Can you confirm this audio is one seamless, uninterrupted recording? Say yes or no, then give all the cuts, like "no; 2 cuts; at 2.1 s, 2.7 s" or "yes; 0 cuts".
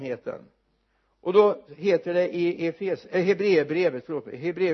yes; 0 cuts